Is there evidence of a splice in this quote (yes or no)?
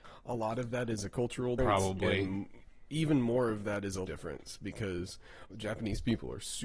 yes